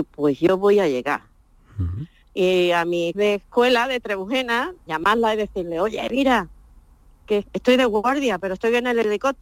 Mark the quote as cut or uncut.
cut